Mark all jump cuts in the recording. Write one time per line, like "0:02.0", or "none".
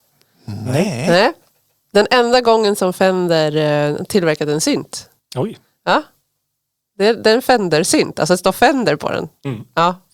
none